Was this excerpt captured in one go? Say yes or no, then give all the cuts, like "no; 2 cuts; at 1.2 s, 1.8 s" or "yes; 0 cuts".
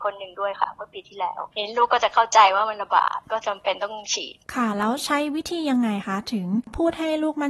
no; 1 cut; at 4.4 s